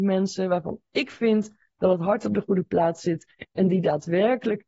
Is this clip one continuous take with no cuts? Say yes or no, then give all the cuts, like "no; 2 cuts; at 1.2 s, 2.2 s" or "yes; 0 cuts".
yes; 0 cuts